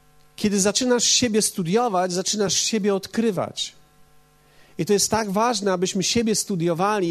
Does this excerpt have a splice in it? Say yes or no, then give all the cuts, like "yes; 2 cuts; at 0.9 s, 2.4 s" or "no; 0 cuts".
no; 0 cuts